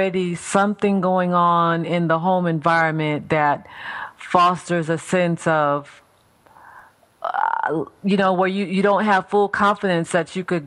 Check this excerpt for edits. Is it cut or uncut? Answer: uncut